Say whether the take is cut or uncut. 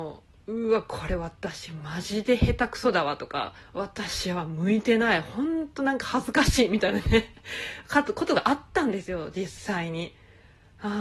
cut